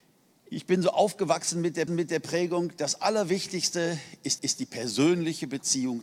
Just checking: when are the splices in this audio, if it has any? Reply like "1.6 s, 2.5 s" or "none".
1.9 s, 4.4 s